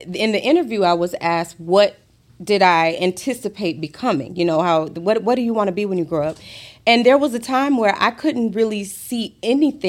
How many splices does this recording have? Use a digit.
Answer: 0